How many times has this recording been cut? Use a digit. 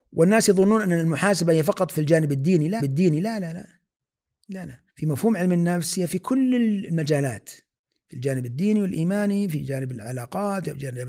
2